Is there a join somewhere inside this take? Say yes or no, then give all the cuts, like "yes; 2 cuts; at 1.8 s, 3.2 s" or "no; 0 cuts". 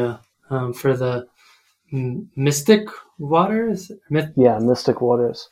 no; 0 cuts